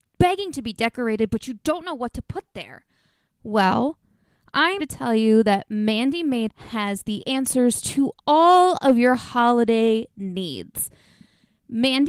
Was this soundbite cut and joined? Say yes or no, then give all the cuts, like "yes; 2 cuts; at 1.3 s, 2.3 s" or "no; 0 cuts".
yes; 2 cuts; at 4.8 s, 6.5 s